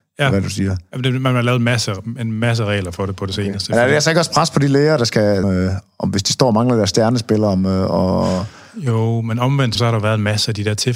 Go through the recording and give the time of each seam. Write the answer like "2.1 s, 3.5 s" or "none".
5.4 s, 9.8 s